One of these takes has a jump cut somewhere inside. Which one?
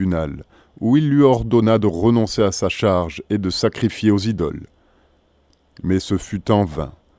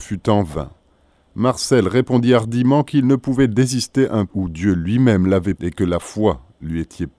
second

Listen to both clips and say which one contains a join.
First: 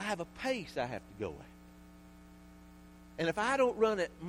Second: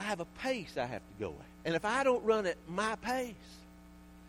second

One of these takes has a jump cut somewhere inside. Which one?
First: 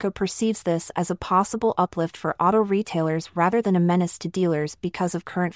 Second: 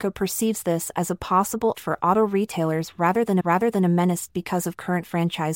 second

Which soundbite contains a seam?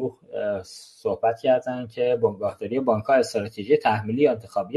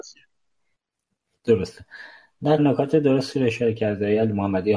second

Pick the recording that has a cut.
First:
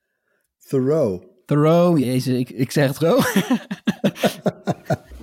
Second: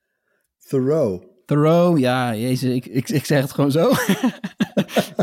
first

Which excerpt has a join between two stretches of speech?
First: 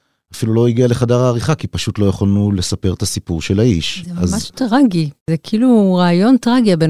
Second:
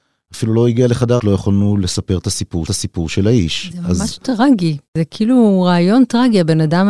second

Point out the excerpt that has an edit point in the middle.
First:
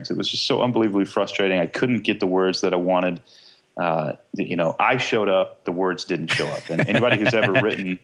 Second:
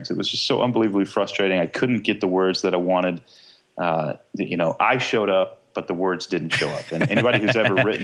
first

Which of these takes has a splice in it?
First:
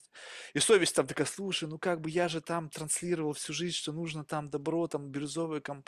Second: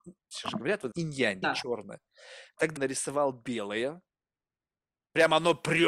second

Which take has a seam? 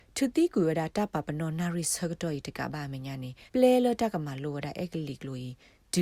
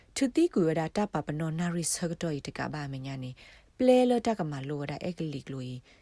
first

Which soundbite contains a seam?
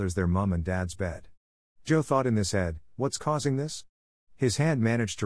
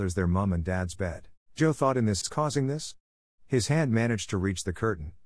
second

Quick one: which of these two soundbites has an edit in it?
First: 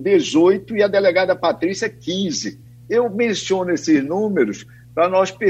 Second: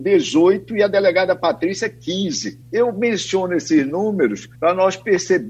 second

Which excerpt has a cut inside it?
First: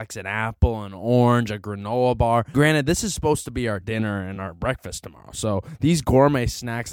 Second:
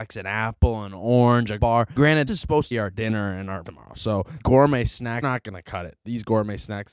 second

